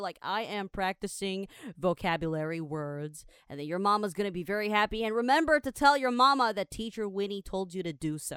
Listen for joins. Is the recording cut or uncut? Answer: uncut